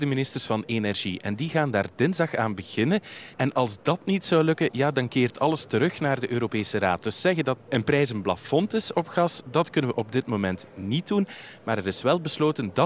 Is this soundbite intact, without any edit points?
no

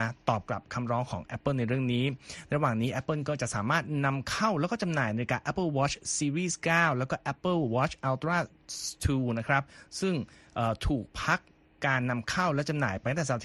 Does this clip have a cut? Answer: no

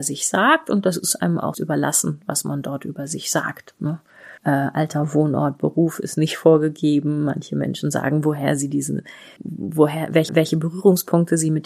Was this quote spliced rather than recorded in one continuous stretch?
yes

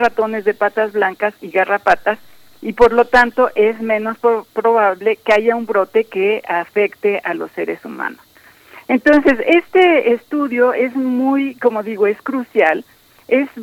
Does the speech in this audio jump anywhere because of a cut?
no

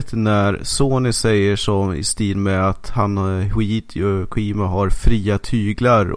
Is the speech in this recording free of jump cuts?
yes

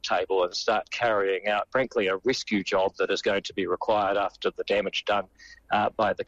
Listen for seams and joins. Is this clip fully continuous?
no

